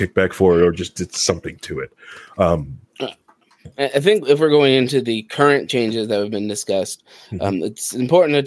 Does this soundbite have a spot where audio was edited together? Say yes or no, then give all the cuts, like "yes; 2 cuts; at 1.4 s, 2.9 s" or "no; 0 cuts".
no; 0 cuts